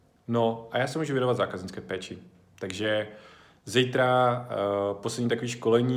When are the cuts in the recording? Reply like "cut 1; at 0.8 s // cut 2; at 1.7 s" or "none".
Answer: none